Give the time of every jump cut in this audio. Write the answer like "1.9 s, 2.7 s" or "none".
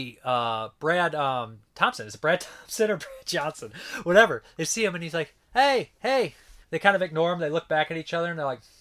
5.4 s, 6.6 s